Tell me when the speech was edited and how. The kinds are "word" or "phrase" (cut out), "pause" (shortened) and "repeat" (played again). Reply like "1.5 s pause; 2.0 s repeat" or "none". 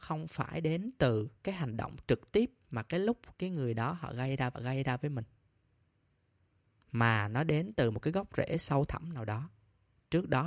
1.4 s pause; 4.5 s repeat